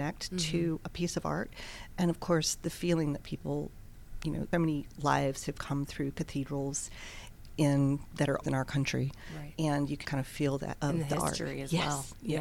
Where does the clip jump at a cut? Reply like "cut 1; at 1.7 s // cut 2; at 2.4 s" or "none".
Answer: cut 1; at 4.5 s // cut 2; at 7.5 s // cut 3; at 8.4 s // cut 4; at 10.0 s // cut 5; at 10.8 s